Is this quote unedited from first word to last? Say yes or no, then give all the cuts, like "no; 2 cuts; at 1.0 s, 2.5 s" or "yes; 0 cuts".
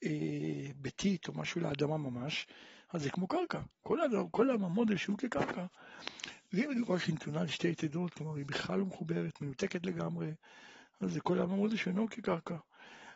yes; 0 cuts